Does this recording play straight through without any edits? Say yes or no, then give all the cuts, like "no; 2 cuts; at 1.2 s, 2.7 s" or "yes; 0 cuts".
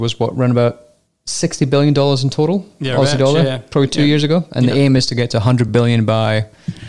yes; 0 cuts